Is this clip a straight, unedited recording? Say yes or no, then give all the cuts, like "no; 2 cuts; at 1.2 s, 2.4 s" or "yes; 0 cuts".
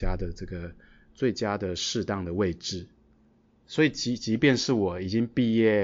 yes; 0 cuts